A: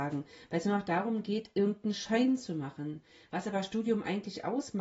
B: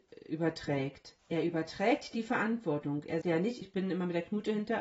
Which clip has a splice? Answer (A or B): B